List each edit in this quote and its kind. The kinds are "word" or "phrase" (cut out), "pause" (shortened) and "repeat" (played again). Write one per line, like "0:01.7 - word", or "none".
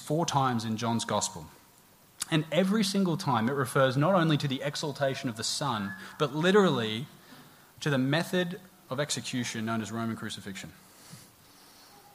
none